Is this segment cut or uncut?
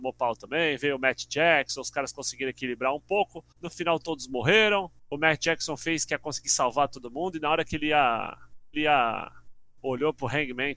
cut